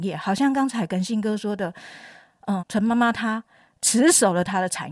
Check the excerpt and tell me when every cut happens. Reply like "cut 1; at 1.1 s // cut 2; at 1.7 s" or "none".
cut 1; at 2.6 s